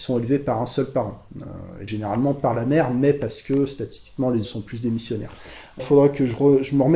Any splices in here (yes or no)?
yes